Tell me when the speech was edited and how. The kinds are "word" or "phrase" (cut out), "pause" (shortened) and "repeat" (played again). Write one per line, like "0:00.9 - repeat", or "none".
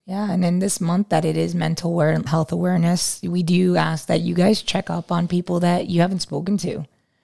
0:02.3 - word